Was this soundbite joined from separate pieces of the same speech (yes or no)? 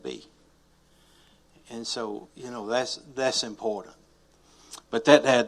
no